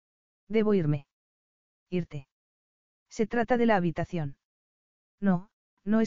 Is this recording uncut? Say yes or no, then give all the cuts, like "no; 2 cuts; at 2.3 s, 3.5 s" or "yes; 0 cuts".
yes; 0 cuts